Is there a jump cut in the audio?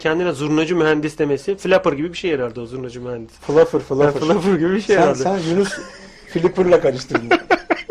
no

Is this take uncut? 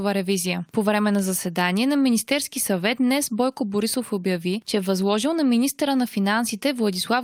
yes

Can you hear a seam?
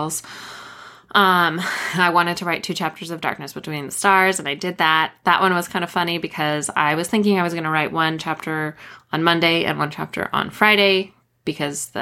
no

